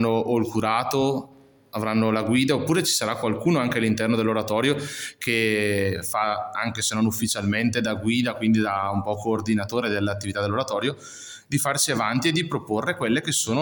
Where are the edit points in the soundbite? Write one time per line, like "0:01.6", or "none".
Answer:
none